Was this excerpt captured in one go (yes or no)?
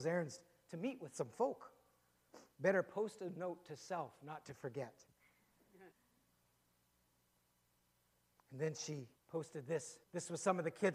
no